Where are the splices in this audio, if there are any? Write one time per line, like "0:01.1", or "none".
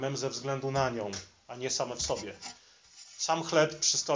none

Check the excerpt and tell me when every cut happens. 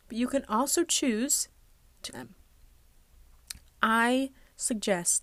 0:02.1

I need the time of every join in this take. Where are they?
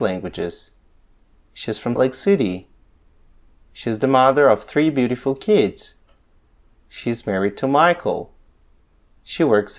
0:02.0

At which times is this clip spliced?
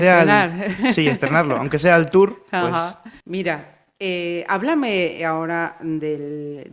0:03.2

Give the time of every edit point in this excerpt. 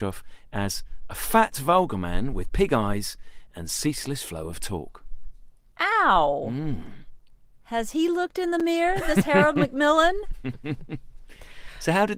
none

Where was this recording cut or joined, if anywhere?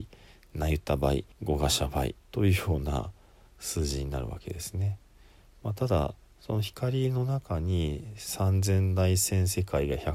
0:01.3
0:02.2

